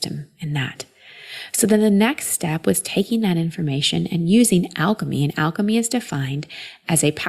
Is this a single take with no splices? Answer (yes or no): yes